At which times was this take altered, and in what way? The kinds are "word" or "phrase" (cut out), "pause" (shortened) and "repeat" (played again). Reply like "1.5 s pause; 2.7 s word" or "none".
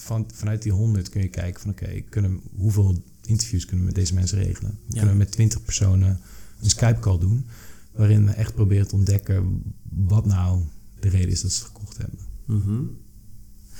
none